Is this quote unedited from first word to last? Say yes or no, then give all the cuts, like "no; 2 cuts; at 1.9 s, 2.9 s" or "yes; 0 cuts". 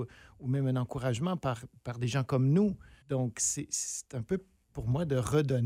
no; 1 cut; at 3.0 s